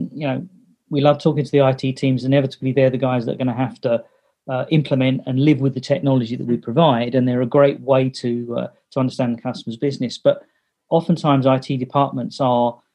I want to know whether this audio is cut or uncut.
uncut